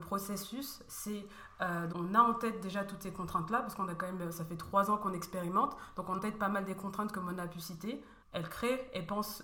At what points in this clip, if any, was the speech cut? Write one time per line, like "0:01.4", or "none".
0:01.9
0:06.2
0:08.2